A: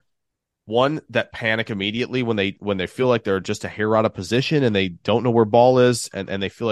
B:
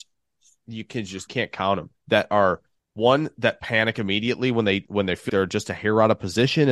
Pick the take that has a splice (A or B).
B